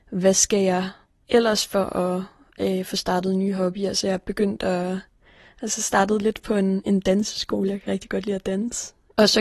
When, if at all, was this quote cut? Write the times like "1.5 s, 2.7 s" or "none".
none